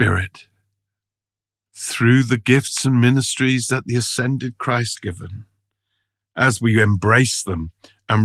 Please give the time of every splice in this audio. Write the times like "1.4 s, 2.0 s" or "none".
5.0 s